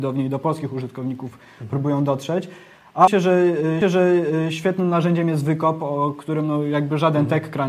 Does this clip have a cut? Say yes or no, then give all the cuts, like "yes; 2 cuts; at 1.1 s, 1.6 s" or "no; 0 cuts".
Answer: yes; 2 cuts; at 3.1 s, 3.8 s